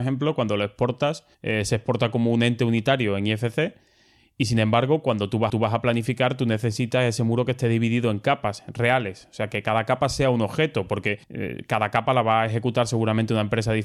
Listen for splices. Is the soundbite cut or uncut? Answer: cut